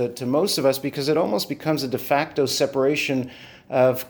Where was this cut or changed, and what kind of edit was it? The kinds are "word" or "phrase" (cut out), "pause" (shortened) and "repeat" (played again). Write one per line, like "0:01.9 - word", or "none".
none